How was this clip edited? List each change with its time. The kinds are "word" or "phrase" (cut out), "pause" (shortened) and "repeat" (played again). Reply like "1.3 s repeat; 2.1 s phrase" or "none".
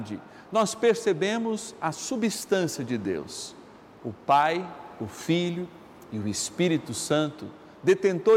none